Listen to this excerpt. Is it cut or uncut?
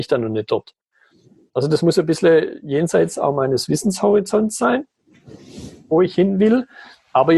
uncut